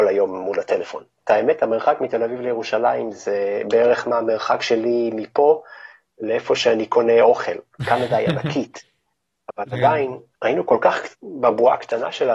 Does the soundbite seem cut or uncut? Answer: cut